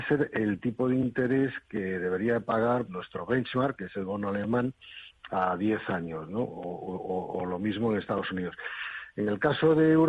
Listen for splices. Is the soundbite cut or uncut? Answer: cut